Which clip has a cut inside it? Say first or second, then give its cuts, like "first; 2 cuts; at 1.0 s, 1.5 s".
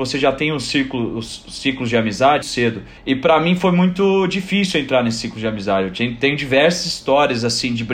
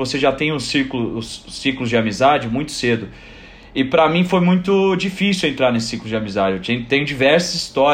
first; 2 cuts; at 2.4 s, 3.0 s